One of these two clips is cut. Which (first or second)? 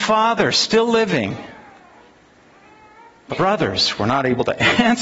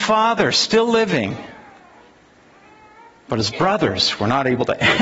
first